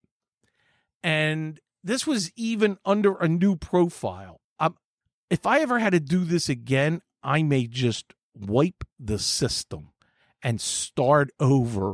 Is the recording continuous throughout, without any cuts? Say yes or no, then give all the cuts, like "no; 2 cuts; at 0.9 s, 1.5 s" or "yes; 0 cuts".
yes; 0 cuts